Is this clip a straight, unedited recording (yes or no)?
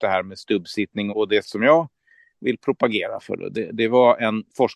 no